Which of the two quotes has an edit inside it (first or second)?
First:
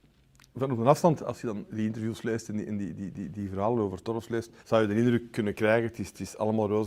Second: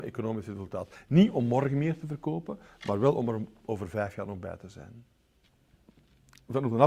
first